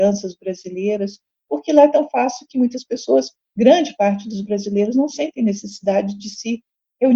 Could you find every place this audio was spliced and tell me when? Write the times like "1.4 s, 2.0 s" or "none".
none

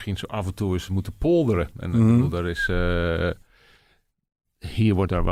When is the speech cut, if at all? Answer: none

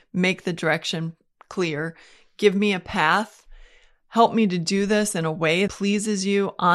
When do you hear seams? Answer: 5.7 s

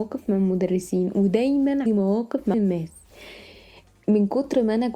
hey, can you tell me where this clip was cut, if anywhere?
1.9 s, 2.5 s

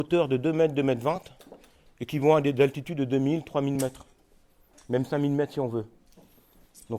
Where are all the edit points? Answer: none

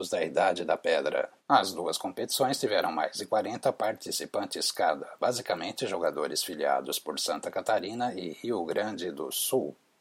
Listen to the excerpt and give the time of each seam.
1.4 s

